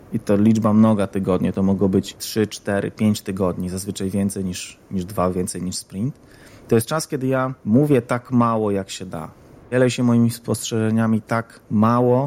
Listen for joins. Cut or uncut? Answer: uncut